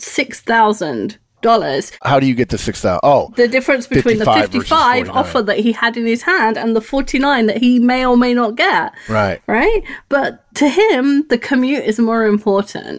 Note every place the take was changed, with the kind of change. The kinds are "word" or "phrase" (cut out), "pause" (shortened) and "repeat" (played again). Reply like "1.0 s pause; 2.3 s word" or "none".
none